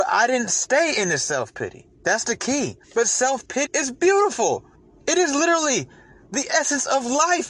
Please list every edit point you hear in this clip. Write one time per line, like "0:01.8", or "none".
0:01.9
0:02.8
0:03.6
0:04.7